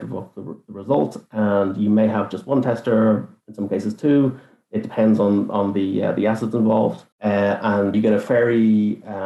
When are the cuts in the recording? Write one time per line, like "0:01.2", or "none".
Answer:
0:07.1
0:07.9